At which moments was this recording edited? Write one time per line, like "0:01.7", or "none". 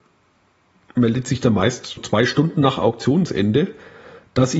0:02.0

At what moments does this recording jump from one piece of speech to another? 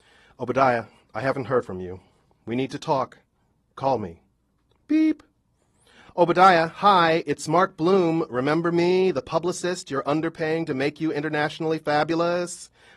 none

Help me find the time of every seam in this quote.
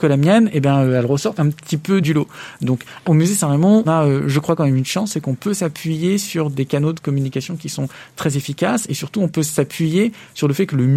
0:01.4
0:02.0
0:03.0
0:03.8

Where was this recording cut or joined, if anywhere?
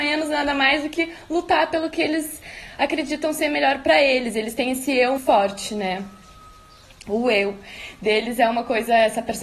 0:05.2

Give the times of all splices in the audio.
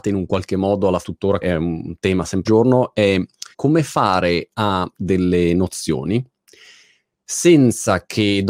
0:01.0
0:01.4
0:02.4
0:03.5
0:05.0

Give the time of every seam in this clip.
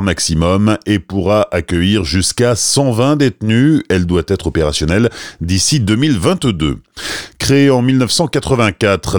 none

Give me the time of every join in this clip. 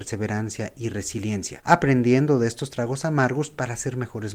none

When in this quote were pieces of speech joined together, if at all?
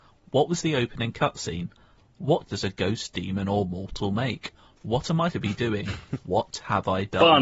0:02.5
0:05.3

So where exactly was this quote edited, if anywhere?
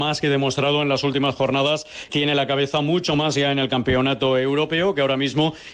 0:02.1

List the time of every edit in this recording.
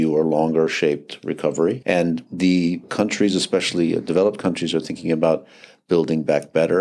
none

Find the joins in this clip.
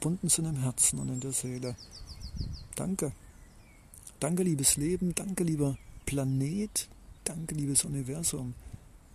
0:07.2

